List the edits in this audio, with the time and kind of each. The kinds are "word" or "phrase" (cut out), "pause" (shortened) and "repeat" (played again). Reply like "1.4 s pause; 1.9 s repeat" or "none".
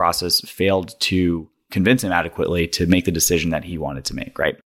none